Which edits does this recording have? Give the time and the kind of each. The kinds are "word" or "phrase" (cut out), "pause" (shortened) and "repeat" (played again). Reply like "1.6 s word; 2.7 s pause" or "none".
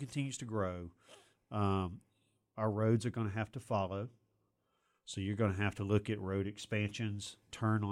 none